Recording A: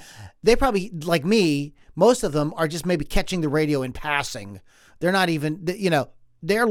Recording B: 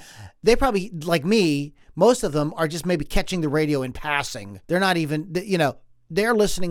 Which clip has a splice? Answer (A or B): B